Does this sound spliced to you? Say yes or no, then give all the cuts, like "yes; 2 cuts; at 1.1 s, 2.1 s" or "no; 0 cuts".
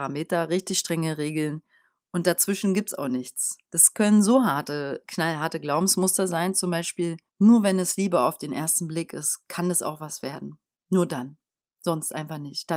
yes; 3 cuts; at 3.6 s, 7.3 s, 10.7 s